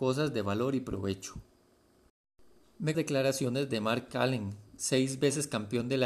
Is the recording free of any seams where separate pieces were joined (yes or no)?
no